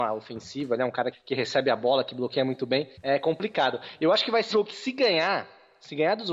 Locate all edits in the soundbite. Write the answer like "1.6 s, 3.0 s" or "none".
1.1 s, 2.9 s, 4.5 s